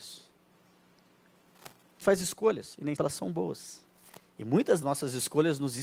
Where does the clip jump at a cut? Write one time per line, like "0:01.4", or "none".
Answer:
0:02.0
0:03.0
0:04.8